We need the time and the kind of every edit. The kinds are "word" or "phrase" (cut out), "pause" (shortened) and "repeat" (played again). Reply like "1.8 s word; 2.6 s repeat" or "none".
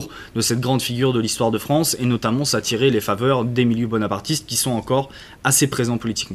none